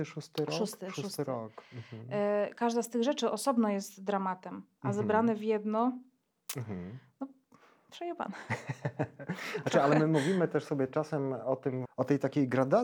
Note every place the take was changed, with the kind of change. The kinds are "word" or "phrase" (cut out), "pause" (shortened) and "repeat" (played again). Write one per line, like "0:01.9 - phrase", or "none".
0:11.8 - word